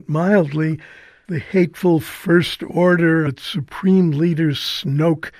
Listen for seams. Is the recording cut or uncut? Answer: cut